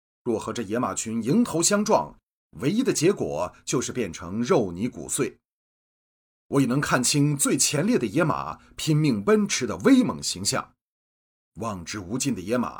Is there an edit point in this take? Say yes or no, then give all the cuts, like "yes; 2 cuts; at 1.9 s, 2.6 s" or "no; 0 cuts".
no; 0 cuts